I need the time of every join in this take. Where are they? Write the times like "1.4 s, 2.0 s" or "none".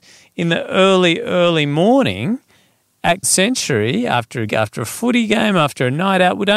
3.2 s, 4.5 s